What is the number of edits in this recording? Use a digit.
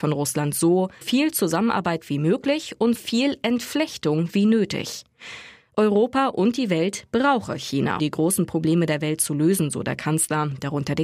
3